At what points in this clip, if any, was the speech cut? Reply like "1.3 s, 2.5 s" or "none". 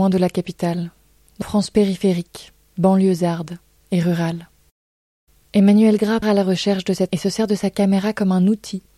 1.4 s, 6.2 s, 7.1 s